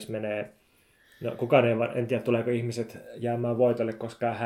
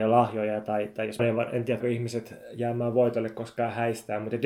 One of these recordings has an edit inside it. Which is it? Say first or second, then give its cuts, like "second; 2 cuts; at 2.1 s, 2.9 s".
second; 2 cuts; at 1.2 s, 1.8 s